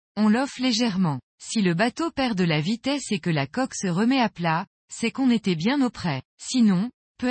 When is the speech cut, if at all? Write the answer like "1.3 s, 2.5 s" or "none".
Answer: 6.3 s